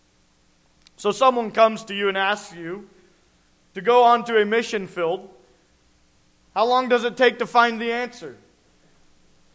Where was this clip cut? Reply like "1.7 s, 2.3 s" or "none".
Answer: none

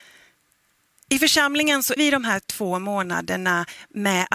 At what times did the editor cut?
2.0 s

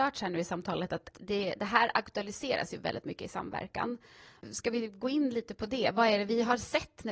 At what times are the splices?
none

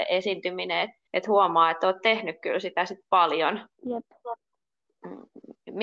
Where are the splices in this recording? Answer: 1.1 s, 3.7 s

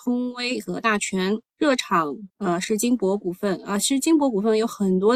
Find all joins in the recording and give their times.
1.5 s, 2.3 s

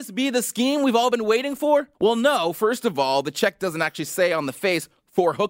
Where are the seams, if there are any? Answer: 1.9 s

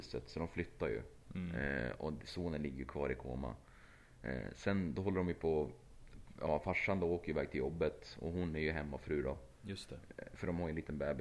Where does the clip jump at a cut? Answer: none

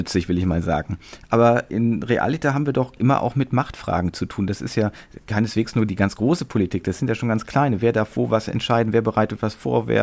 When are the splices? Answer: 3.0 s

